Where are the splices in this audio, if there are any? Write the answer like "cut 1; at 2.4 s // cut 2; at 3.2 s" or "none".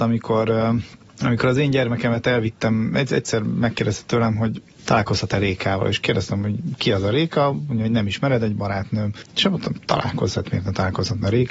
none